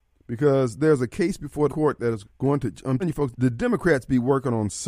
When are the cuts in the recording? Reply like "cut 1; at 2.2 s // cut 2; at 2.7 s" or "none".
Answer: cut 1; at 1.7 s // cut 2; at 2.2 s // cut 3; at 3.0 s // cut 4; at 3.3 s